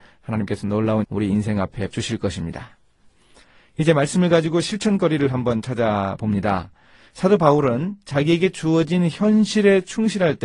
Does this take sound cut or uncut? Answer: cut